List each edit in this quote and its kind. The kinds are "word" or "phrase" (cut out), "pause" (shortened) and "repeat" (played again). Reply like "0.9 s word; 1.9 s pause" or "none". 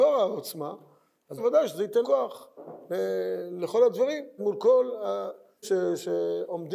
1.4 s word; 2.0 s word; 4.4 s word; 5.6 s word